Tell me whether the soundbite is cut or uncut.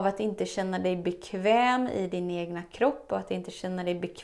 uncut